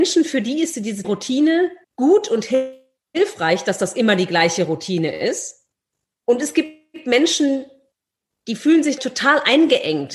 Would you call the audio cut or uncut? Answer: cut